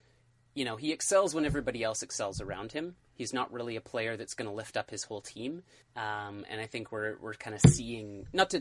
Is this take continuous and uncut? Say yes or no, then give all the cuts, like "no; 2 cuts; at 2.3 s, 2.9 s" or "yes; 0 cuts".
no; 1 cut; at 5.8 s